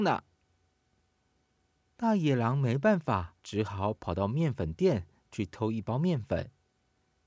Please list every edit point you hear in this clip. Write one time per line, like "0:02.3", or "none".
0:03.4